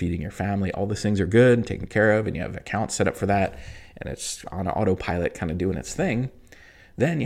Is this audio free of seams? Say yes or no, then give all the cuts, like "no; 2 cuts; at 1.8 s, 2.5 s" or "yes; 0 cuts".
yes; 0 cuts